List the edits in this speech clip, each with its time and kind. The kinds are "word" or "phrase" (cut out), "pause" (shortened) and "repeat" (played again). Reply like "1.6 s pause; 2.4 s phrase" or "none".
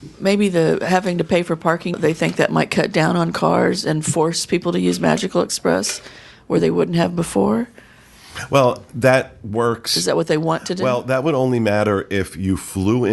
1.9 s word